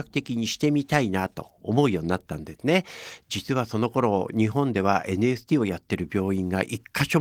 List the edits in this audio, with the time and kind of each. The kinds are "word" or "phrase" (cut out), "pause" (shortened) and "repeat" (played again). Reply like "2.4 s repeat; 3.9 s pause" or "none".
none